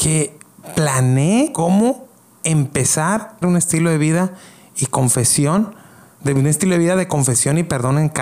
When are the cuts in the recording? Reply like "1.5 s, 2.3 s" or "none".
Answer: 3.4 s

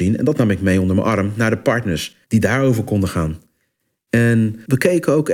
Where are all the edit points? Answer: 2.2 s

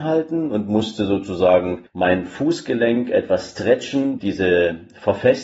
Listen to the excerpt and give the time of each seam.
1.9 s, 4.2 s

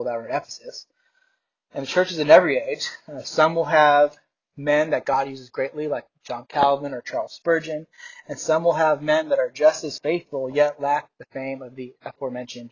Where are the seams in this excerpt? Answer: none

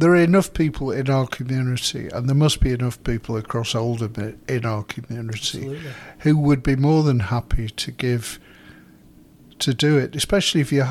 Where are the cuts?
none

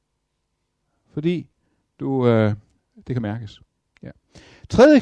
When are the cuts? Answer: 2.8 s

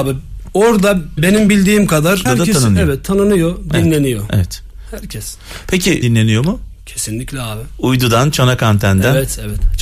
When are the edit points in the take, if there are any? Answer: 1.2 s, 2.3 s, 6.0 s

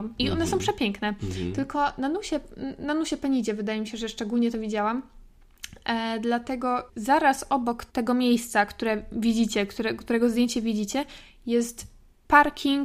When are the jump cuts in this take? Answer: 6.9 s, 7.9 s

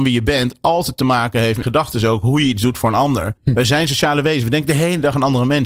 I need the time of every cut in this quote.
1.6 s, 3.4 s

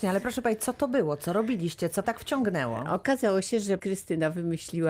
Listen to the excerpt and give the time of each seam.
2.0 s, 3.8 s

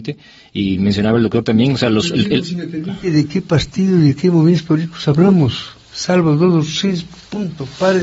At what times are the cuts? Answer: none

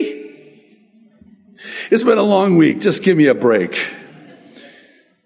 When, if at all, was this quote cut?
none

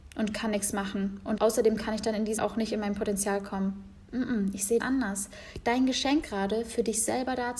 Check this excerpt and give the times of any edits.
1.4 s, 2.4 s, 4.8 s, 6.2 s

